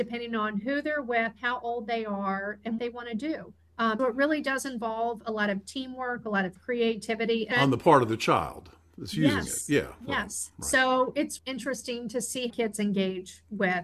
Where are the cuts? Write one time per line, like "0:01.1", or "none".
0:02.8
0:04.0
0:07.5
0:11.4
0:12.5